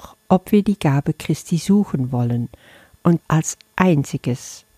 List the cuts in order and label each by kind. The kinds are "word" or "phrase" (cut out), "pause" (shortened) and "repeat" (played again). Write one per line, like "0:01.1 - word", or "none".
0:03.2 - word